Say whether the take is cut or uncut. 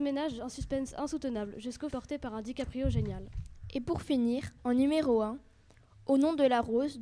cut